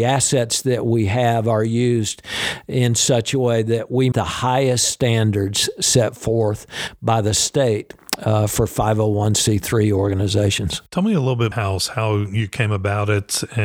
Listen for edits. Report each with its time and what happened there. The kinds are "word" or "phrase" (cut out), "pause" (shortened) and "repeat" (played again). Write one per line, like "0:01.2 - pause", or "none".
0:04.1 - word
0:11.5 - phrase